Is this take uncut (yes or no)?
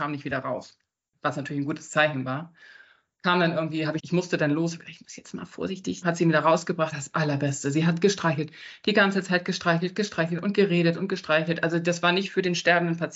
no